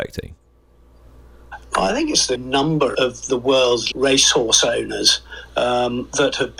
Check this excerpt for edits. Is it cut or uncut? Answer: cut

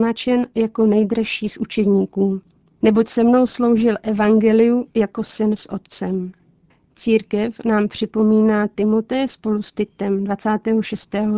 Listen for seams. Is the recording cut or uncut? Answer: uncut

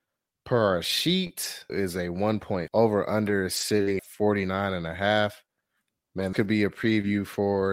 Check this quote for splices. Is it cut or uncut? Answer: cut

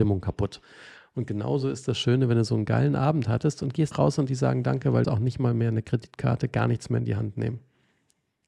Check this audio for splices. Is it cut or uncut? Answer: cut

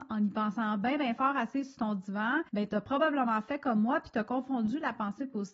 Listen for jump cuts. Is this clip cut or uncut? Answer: cut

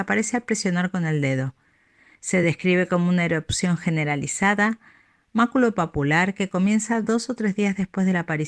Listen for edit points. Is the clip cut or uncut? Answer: uncut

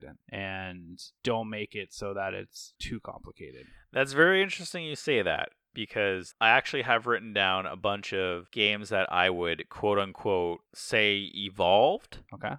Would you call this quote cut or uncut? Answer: cut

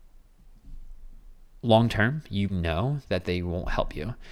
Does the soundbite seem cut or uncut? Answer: cut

